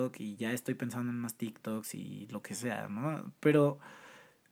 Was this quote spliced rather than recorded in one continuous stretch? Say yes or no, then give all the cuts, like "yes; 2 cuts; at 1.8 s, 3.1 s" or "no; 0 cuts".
no; 0 cuts